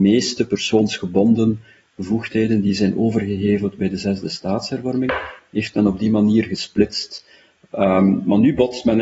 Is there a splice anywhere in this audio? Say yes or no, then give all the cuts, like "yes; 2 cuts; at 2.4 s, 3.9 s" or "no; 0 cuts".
no; 0 cuts